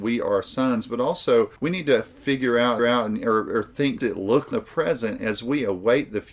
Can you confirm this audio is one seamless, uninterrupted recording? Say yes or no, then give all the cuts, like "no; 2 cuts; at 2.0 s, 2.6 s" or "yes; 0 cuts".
no; 4 cuts; at 1.6 s, 2.8 s, 4.0 s, 4.5 s